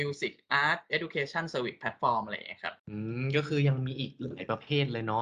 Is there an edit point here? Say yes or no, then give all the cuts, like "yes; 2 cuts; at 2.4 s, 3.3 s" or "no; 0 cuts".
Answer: yes; 1 cut; at 2.8 s